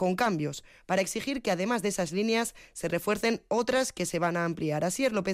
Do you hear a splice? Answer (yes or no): no